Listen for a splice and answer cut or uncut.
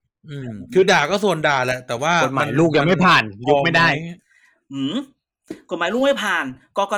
uncut